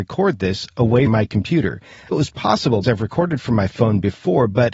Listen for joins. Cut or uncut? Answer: cut